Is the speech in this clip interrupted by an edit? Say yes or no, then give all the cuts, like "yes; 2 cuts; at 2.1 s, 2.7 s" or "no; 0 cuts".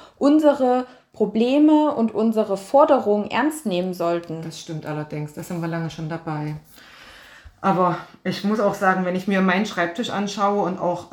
no; 0 cuts